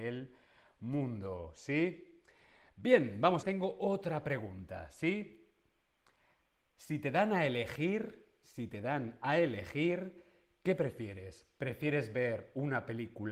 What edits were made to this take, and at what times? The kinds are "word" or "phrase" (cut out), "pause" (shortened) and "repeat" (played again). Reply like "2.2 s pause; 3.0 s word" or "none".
3.4 s phrase

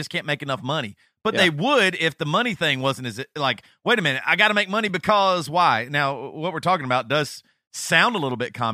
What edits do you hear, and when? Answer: none

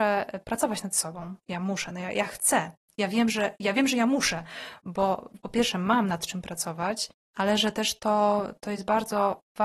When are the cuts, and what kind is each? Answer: 1.4 s pause

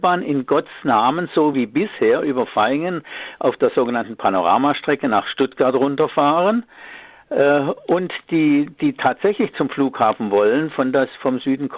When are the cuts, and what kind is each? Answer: none

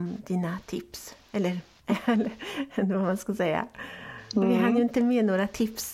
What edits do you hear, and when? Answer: none

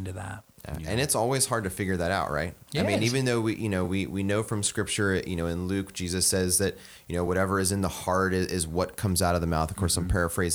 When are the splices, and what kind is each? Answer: none

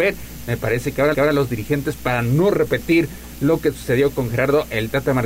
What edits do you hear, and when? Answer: 1.1 s repeat

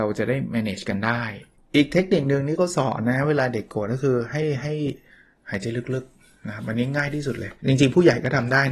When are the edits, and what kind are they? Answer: 1.5 s pause; 7.6 s pause

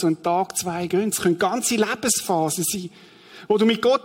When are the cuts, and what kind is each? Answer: 1.1 s word

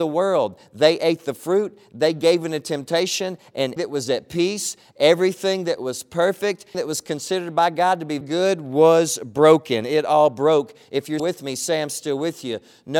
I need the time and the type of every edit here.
3.8 s word; 6.7 s word; 8.2 s word; 11.2 s word

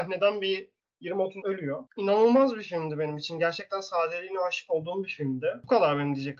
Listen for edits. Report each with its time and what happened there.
1.4 s phrase

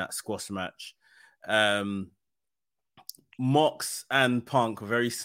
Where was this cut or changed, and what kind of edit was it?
none

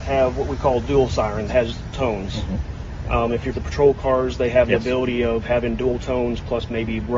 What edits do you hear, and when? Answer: 1.5 s word; 1.9 s word; 3.5 s phrase

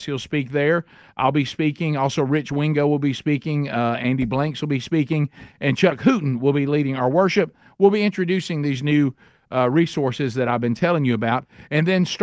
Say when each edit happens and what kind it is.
none

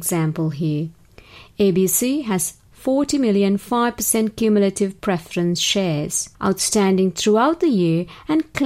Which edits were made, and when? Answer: 6.3 s pause

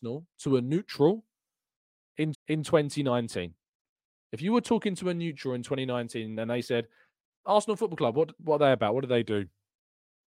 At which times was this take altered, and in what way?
2.3 s repeat

